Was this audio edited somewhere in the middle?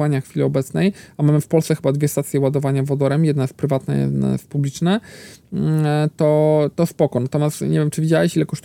no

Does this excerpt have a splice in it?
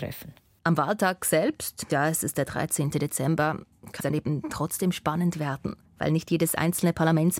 yes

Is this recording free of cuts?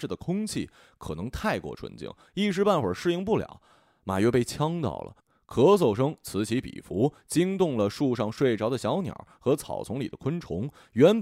yes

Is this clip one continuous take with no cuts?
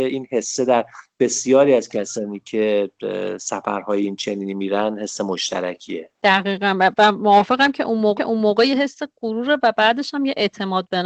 no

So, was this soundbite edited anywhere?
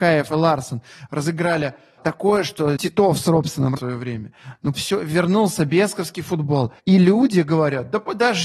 yes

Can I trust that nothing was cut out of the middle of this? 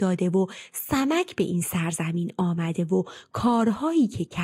yes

